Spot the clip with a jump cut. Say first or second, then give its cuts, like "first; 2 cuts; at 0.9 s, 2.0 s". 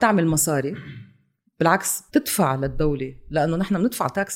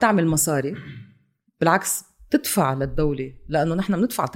first; 1 cut; at 2.1 s